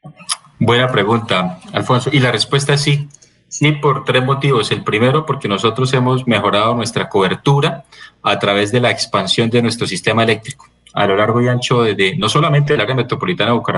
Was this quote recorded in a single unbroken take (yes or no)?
yes